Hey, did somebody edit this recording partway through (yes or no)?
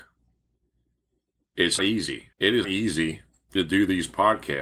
yes